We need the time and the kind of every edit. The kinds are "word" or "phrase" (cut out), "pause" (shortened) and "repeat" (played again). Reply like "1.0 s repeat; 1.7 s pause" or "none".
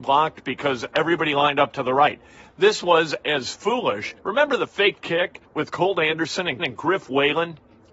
4.2 s pause; 5.4 s pause; 6.6 s repeat